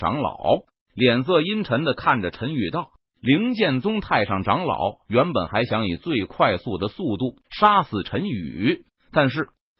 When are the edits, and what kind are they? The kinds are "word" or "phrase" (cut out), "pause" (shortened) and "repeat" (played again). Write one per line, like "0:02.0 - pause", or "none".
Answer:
0:07.4 - pause
0:08.9 - phrase